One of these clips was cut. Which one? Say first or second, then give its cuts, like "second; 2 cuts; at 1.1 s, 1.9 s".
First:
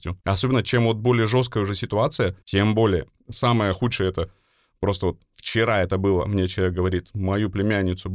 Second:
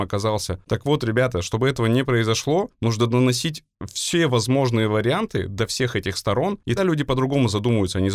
second; 1 cut; at 6.8 s